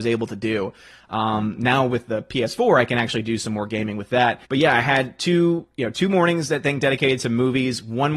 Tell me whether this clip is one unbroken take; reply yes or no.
no